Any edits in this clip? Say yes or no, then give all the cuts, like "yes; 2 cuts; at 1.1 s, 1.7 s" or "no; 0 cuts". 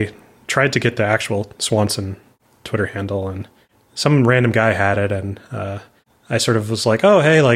no; 0 cuts